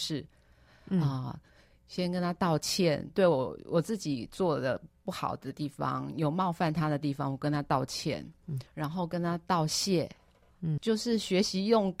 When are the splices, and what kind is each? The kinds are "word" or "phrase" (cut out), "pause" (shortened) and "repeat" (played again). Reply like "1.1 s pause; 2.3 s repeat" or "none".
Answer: 8.7 s pause; 10.8 s word